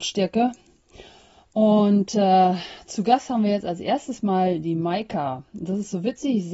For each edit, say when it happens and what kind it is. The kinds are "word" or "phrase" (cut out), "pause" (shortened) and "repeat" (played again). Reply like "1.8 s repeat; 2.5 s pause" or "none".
none